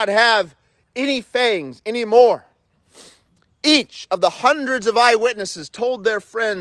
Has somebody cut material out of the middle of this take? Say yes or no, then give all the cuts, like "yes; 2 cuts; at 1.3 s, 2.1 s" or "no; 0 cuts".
no; 0 cuts